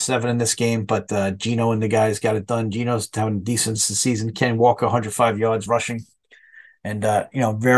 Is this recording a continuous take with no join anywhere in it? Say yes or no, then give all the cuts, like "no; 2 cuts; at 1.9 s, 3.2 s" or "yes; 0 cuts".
yes; 0 cuts